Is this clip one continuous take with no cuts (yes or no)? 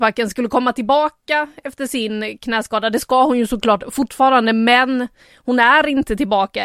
yes